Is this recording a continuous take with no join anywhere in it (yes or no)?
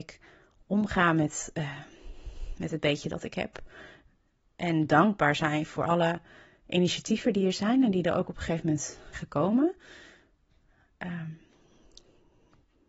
no